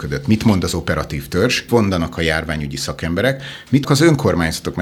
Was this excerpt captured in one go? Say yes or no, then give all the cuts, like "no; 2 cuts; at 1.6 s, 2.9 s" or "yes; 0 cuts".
no; 2 cuts; at 1.7 s, 3.8 s